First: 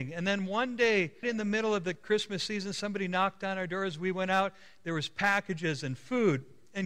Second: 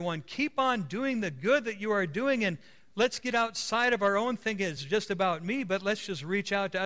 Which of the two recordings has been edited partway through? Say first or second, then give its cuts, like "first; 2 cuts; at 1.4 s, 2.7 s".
first; 1 cut; at 1.2 s